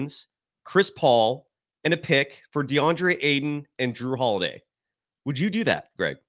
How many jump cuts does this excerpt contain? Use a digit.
0